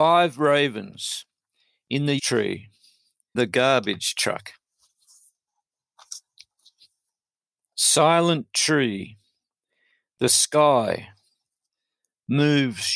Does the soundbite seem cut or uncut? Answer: cut